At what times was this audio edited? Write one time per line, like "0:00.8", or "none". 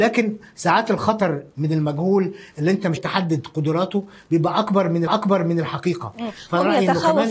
0:03.0
0:05.1